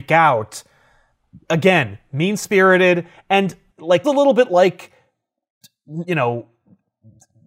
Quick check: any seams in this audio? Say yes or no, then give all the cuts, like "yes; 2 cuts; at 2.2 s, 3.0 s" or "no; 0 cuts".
yes; 2 cuts; at 4.0 s, 6.1 s